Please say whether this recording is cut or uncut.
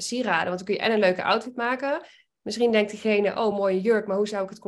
uncut